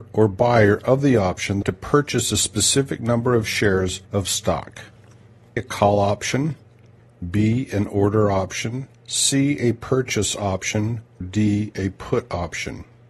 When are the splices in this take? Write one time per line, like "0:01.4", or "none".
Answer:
0:01.6
0:04.0
0:05.6
0:09.0
0:11.2